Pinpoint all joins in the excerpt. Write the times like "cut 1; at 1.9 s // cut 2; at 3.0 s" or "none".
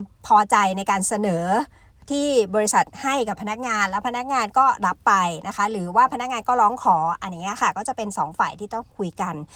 none